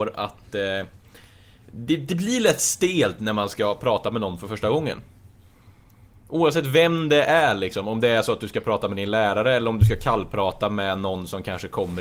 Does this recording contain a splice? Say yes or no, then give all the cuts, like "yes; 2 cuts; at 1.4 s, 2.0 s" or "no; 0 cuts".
no; 0 cuts